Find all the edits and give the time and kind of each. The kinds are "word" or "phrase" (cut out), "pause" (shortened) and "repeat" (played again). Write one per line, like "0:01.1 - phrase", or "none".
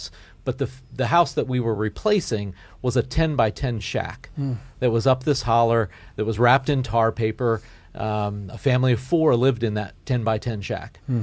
none